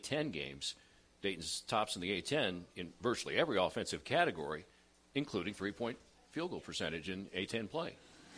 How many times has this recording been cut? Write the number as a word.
zero